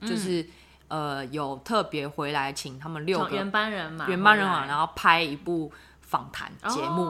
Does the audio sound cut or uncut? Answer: uncut